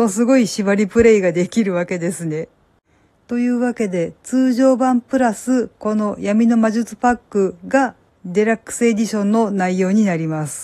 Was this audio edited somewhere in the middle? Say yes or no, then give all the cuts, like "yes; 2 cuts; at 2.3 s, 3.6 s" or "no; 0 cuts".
yes; 1 cut; at 8.1 s